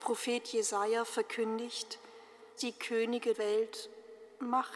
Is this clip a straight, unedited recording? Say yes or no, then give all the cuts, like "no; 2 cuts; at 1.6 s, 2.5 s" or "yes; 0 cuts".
no; 2 cuts; at 2.6 s, 3.3 s